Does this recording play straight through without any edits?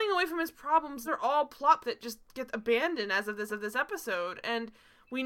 no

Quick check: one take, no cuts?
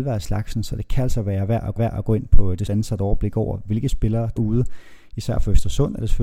no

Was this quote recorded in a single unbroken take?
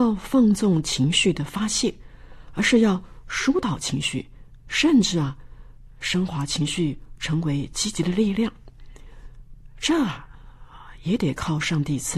no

